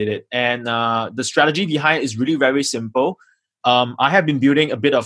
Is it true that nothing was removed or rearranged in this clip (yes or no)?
yes